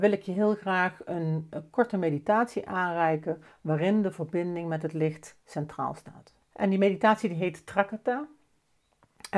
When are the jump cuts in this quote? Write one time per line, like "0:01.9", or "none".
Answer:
0:06.4